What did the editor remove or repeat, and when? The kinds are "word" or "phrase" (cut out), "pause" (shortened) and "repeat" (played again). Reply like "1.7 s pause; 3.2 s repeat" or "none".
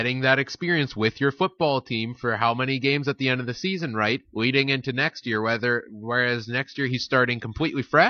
4.2 s pause

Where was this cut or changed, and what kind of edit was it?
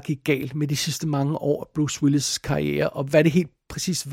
none

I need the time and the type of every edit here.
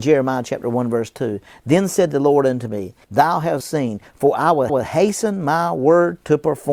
3.0 s pause; 3.6 s word; 4.7 s repeat

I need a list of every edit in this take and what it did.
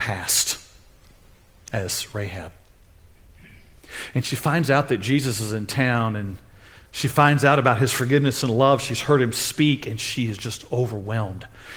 6.9 s pause

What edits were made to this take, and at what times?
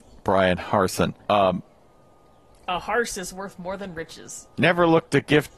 1.2 s pause; 4.5 s pause

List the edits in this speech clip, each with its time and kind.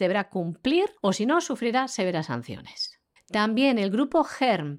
1.0 s pause; 3.2 s pause

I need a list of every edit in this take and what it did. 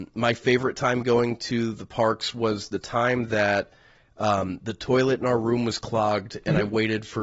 none

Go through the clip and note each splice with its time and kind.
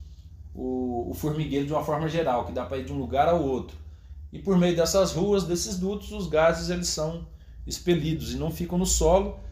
none

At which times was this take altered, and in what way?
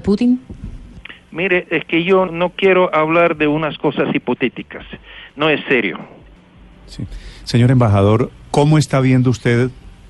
2.3 s word; 6.4 s pause

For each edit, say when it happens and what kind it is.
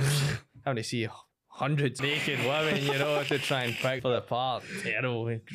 2.0 s word; 4.0 s word

